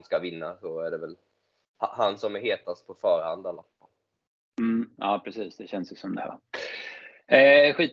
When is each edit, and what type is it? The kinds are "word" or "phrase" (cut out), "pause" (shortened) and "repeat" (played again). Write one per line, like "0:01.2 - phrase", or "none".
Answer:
none